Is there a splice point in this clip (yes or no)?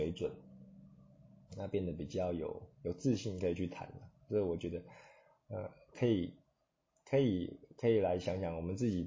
no